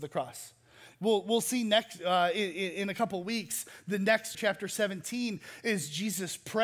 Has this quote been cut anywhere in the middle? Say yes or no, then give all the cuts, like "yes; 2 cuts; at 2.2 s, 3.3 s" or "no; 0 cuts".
yes; 1 cut; at 4.3 s